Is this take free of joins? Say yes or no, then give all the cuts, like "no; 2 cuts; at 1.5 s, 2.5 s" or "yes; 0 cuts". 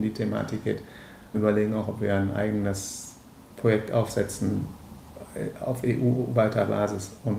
no; 1 cut; at 1.3 s